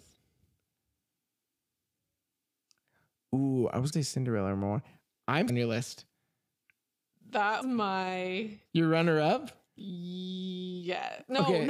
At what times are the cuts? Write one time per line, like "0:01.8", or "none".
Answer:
0:03.9
0:05.5
0:07.6
0:08.6
0:09.7